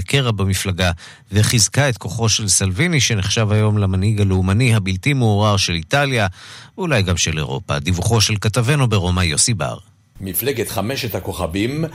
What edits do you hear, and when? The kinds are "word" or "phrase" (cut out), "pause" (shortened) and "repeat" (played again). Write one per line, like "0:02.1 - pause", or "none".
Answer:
none